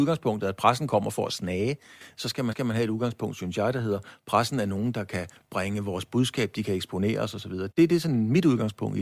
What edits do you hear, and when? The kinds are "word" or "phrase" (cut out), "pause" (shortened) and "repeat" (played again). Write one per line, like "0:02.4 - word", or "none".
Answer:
0:02.5 - repeat
0:07.7 - word